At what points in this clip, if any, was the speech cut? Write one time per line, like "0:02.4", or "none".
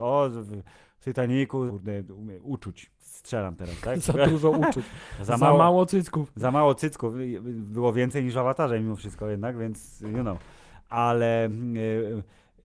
0:01.7
0:03.0